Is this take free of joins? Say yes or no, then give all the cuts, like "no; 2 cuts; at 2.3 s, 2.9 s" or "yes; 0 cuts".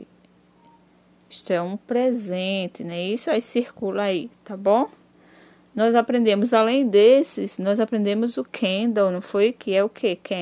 yes; 0 cuts